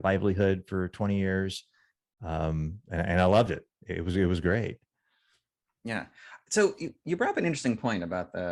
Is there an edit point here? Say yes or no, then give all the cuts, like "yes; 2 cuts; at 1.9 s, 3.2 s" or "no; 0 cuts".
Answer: no; 0 cuts